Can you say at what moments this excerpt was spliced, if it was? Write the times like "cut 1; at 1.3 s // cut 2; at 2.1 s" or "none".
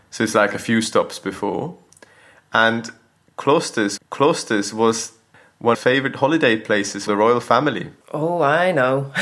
cut 1; at 4.0 s // cut 2; at 5.7 s // cut 3; at 7.1 s // cut 4; at 8.0 s